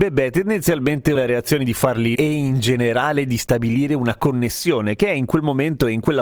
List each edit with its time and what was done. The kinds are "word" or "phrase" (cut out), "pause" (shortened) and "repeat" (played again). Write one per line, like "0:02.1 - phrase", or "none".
0:01.2 - word
0:02.2 - word